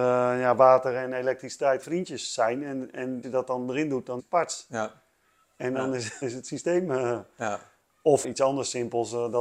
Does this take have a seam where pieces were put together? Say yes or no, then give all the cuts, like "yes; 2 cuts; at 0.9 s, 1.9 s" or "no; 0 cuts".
yes; 5 cuts; at 1.8 s, 3.2 s, 4.2 s, 6.2 s, 8.2 s